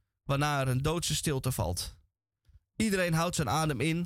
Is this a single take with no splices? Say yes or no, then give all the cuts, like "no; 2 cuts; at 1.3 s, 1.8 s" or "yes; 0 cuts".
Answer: yes; 0 cuts